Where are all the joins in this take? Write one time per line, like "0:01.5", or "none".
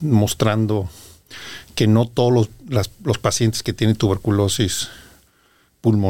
none